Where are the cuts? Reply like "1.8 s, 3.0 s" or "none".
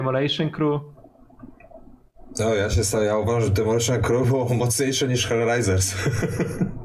none